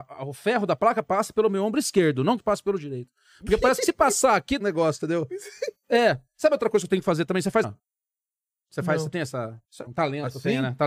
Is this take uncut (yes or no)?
no